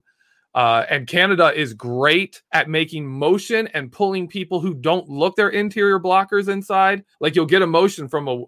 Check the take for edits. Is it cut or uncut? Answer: cut